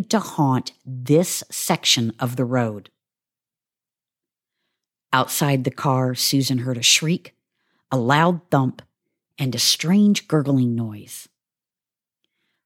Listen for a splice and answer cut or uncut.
uncut